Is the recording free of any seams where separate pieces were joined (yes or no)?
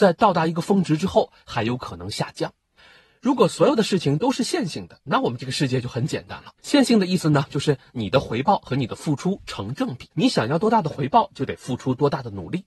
no